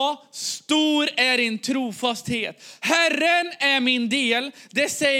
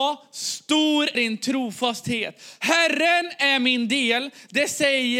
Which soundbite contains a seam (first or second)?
second